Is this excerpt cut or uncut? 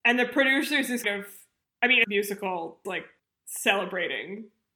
cut